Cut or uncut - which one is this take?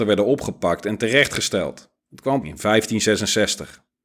cut